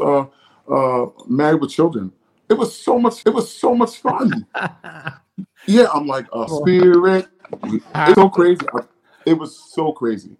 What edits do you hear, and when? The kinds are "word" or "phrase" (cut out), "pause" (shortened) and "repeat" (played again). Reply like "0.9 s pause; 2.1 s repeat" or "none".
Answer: 3.2 s repeat; 6.5 s word; 8.1 s word

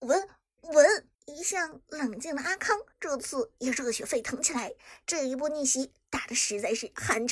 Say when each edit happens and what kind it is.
1.1 s pause; 2.9 s pause

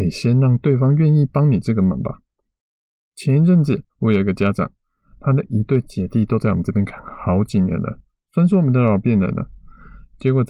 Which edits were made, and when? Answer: 3.9 s pause

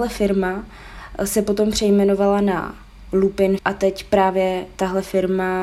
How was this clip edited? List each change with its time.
3.6 s word

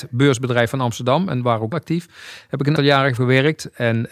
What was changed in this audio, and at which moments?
1.7 s word; 2.8 s word; 3.2 s word

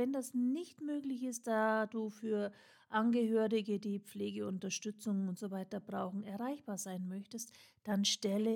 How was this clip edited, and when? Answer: none

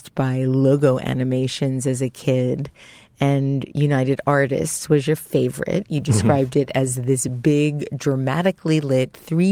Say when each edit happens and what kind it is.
none

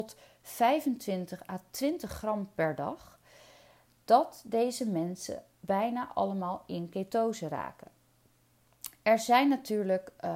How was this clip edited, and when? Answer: none

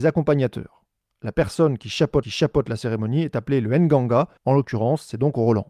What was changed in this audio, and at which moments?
2.2 s repeat; 4.4 s pause

